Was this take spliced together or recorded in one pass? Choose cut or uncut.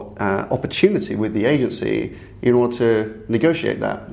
uncut